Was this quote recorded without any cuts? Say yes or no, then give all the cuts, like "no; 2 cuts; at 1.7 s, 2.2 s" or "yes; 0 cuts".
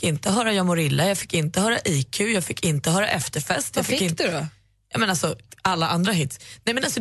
yes; 0 cuts